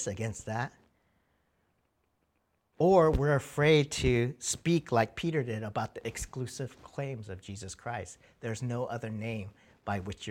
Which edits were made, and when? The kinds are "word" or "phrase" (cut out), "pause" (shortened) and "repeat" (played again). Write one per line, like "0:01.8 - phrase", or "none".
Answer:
none